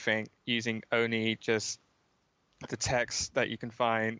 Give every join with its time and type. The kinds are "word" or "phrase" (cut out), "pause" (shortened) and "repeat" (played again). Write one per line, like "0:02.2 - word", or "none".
0:02.7 - word